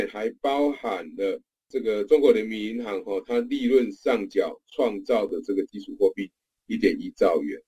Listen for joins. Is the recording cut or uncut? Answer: uncut